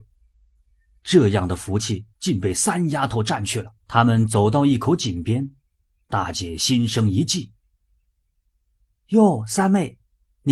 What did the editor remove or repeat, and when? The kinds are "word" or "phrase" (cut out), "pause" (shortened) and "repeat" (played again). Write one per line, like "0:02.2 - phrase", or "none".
0:02.1 - pause
0:03.8 - pause